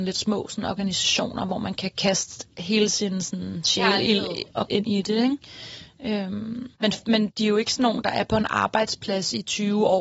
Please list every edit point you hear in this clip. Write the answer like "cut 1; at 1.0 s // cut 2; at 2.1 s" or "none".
cut 1; at 4.7 s // cut 2; at 6.8 s // cut 3; at 7.3 s